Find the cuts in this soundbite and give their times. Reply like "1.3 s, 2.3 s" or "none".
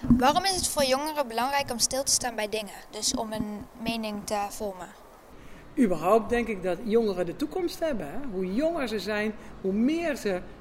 none